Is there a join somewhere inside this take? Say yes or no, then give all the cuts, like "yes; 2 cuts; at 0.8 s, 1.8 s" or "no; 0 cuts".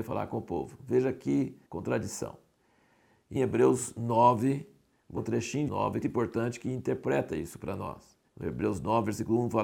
yes; 6 cuts; at 1.6 s, 3.4 s, 5.2 s, 5.7 s, 6.0 s, 8.3 s